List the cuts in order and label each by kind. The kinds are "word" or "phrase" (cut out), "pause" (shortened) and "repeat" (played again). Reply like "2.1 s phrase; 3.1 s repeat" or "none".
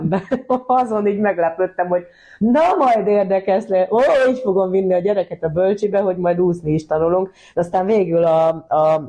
none